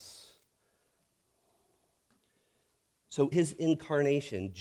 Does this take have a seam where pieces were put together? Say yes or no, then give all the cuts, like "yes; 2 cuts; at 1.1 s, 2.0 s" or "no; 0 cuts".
yes; 1 cut; at 3.3 s